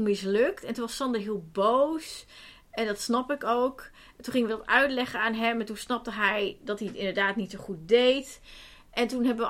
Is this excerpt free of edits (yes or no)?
yes